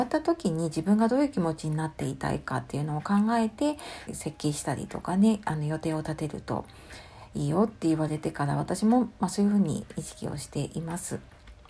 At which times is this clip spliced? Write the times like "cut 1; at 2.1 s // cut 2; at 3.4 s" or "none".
cut 1; at 4.1 s